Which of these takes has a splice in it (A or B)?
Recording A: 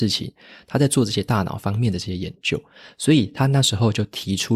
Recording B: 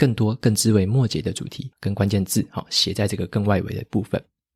B